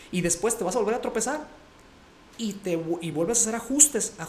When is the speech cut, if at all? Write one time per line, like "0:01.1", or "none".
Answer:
none